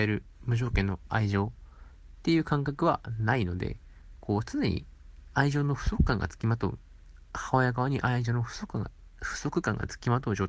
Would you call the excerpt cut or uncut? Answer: uncut